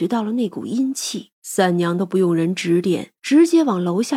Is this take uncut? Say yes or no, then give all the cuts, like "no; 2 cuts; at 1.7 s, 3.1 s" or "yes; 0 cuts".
no; 2 cuts; at 1.3 s, 3.2 s